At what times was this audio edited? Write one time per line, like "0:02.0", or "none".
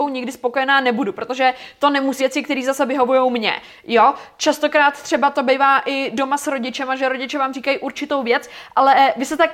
0:02.2